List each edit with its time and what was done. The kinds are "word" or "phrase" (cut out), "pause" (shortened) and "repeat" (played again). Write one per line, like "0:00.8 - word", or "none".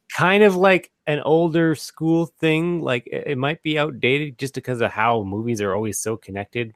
none